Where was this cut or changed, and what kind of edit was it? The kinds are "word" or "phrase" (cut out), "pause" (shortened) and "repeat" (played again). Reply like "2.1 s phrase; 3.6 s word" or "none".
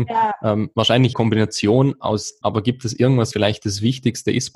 1.1 s phrase; 2.4 s word; 3.3 s word